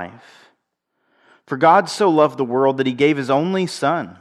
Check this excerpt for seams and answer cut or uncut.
uncut